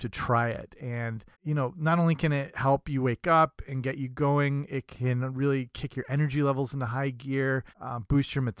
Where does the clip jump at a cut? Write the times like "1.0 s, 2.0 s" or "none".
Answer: 1.3 s, 7.7 s